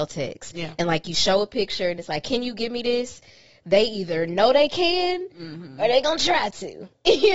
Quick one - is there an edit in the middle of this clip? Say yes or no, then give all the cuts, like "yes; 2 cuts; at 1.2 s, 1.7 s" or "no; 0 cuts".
no; 0 cuts